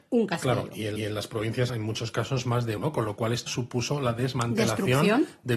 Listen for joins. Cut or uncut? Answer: cut